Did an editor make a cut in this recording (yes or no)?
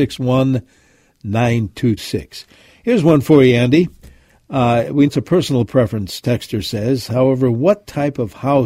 yes